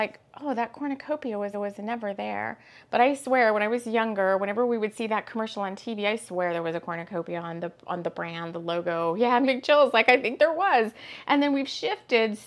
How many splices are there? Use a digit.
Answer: 2